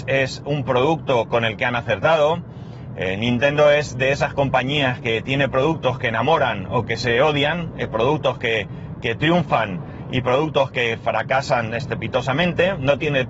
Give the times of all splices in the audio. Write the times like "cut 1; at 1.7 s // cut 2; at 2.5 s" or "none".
none